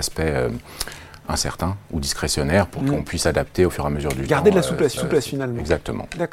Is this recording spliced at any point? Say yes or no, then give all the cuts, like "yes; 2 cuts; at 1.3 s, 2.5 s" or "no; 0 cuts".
yes; 1 cut; at 5.0 s